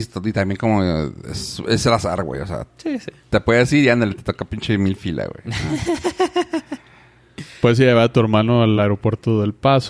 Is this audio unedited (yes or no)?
yes